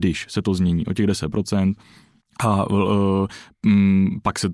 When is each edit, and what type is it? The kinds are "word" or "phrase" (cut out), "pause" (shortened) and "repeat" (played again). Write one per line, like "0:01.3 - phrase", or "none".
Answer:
0:02.2 - pause